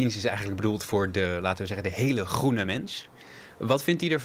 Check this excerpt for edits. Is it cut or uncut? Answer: uncut